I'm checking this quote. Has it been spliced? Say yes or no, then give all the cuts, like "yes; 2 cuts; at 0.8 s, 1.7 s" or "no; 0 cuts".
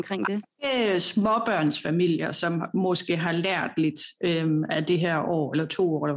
no; 0 cuts